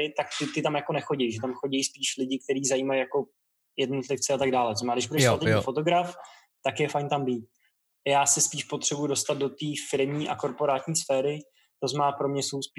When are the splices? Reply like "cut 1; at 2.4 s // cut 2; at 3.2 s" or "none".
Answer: none

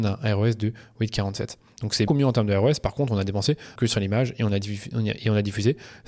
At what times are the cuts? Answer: cut 1; at 2.1 s // cut 2; at 3.8 s

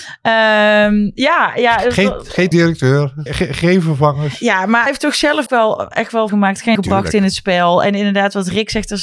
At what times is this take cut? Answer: cut 1; at 2.5 s // cut 2; at 3.3 s // cut 3; at 4.9 s // cut 4; at 5.5 s // cut 5; at 6.3 s // cut 6; at 6.8 s

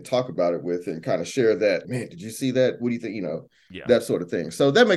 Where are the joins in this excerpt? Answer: cut 1; at 1.8 s

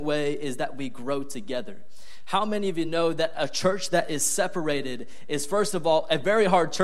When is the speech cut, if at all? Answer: none

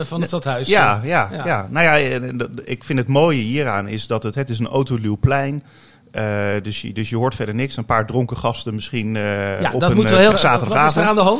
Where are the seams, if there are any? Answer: cut 1; at 10.3 s

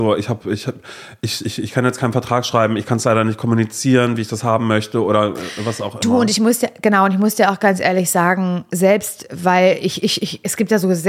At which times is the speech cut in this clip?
none

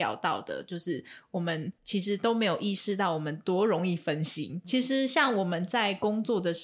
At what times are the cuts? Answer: cut 1; at 1.8 s

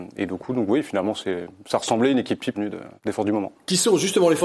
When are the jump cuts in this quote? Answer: cut 1; at 2.5 s // cut 2; at 3.0 s

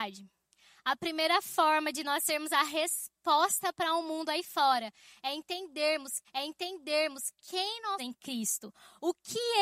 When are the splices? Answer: cut 1; at 6.2 s // cut 2; at 8.0 s

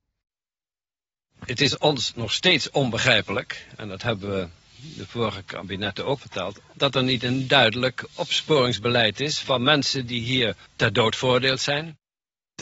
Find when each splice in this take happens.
cut 1; at 6.2 s

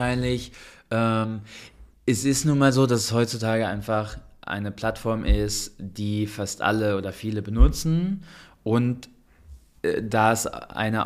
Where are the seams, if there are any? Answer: none

